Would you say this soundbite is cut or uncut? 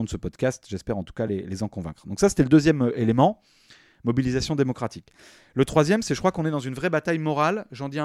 uncut